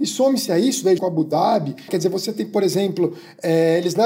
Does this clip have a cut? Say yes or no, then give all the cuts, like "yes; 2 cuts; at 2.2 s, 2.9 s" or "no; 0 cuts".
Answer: yes; 2 cuts; at 1.0 s, 1.9 s